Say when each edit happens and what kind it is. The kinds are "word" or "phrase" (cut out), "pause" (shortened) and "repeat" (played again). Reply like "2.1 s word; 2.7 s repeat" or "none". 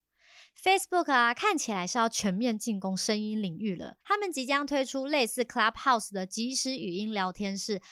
4.0 s pause